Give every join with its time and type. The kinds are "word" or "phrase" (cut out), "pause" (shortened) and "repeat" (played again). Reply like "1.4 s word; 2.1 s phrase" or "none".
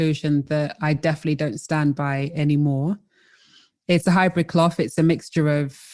none

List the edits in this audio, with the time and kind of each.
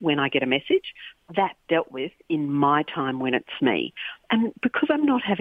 1.6 s word; 3.6 s word

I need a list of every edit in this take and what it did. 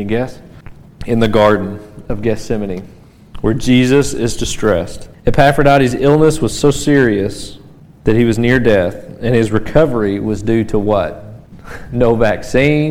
5.1 s pause

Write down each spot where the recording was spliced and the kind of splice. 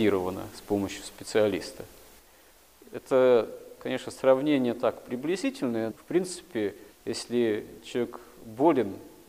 5.9 s word; 6.9 s pause

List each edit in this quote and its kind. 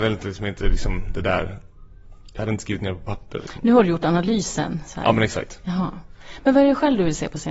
none

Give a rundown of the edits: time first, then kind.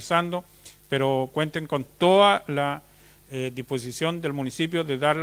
none

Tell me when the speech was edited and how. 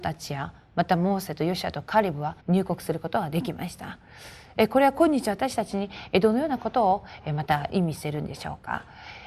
2.4 s pause

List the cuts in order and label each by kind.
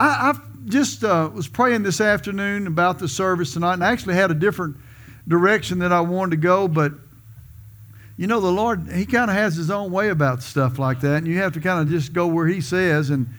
none

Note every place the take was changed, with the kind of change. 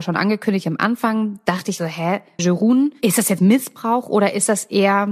1.8 s word; 2.4 s phrase; 3.4 s word

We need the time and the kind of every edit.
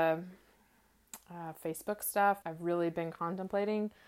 2.4 s word

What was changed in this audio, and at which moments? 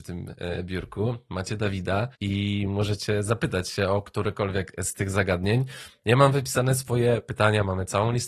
2.1 s pause

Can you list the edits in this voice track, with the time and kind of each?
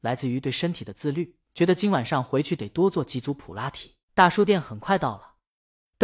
1.4 s pause; 4.0 s pause

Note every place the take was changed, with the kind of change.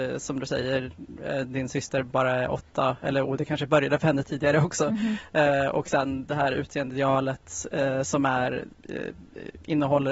none

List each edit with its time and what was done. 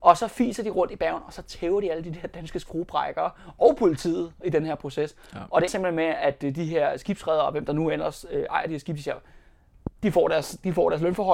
5.7 s word

